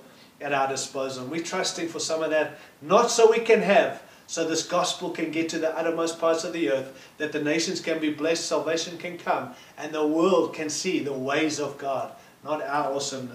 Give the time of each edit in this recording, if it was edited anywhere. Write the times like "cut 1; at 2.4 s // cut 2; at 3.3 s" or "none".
none